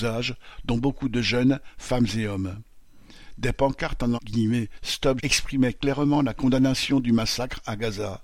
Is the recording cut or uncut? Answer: cut